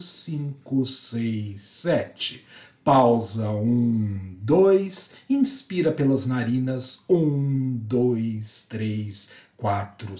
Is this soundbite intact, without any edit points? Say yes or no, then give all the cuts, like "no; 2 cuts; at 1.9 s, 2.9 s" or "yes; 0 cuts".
yes; 0 cuts